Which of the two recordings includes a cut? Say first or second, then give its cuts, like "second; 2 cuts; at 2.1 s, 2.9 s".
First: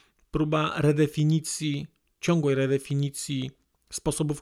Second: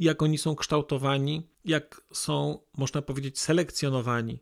second; 1 cut; at 1.5 s